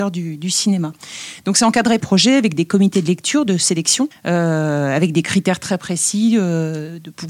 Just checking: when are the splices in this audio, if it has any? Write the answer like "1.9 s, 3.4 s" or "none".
2.0 s, 4.1 s